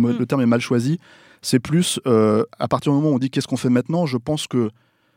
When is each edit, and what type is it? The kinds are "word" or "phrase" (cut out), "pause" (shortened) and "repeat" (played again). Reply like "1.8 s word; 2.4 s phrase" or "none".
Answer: none